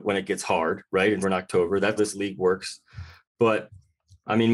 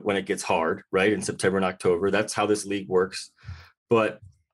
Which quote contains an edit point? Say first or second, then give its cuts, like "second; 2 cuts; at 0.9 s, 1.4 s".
first; 2 cuts; at 1.2 s, 2.0 s